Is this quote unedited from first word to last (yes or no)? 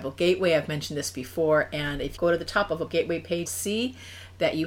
no